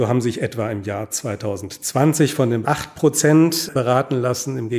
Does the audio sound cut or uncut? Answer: cut